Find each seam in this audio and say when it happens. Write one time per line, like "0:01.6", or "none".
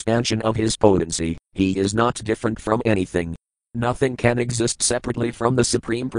none